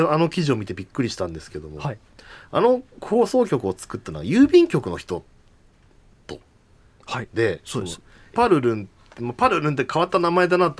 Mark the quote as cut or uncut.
cut